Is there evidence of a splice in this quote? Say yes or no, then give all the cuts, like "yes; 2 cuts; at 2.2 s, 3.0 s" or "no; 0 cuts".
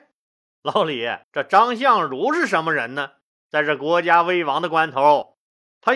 yes; 2 cuts; at 1.2 s, 3.3 s